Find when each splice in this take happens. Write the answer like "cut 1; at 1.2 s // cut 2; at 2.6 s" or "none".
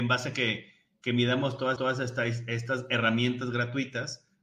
cut 1; at 1.8 s